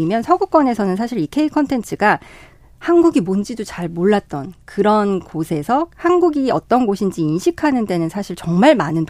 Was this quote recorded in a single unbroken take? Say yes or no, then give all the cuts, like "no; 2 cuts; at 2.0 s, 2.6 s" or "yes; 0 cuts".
yes; 0 cuts